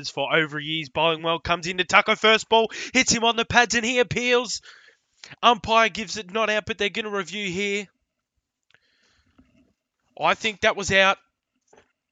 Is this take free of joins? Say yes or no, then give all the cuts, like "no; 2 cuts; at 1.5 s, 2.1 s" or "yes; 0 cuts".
yes; 0 cuts